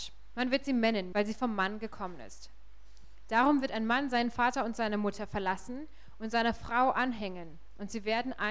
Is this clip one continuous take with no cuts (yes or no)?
no